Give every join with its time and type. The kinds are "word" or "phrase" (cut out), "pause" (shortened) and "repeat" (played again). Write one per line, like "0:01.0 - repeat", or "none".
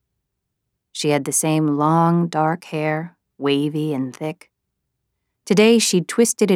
none